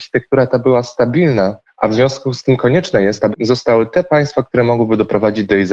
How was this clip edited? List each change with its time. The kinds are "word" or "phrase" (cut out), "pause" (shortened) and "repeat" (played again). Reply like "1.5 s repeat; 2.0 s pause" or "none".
1.7 s pause; 3.3 s word